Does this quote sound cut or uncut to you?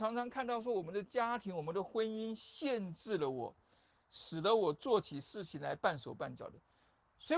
uncut